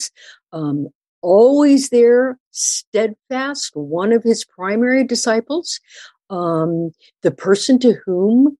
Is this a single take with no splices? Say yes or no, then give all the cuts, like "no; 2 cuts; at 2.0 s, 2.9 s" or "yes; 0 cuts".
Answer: yes; 0 cuts